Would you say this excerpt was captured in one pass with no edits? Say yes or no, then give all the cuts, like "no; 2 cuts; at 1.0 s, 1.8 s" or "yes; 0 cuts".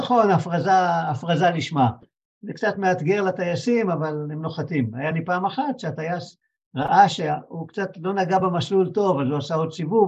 yes; 0 cuts